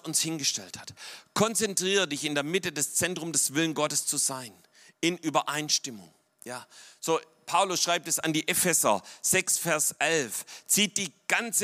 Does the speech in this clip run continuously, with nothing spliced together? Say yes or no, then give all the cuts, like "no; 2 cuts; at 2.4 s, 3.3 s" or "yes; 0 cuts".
yes; 0 cuts